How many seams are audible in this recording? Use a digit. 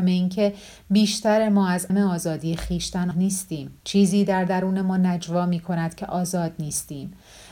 3